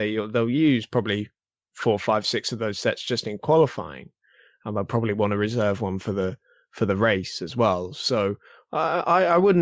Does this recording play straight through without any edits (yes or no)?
yes